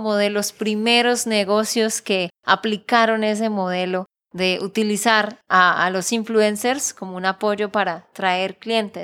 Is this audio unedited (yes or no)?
yes